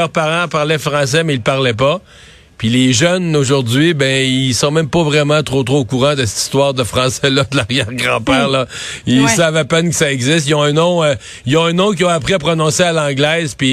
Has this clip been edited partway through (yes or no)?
no